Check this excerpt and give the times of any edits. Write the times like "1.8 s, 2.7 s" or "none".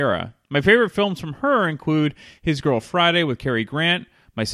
none